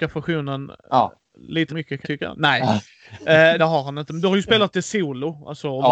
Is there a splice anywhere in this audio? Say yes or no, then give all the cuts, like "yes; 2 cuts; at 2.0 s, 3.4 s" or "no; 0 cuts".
yes; 3 cuts; at 1.7 s, 2.0 s, 3.6 s